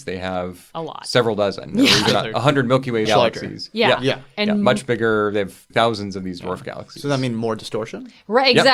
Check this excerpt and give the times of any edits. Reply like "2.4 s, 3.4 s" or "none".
3.1 s, 5.7 s